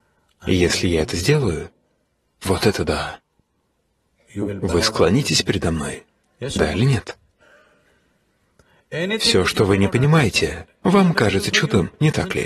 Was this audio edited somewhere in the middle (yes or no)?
no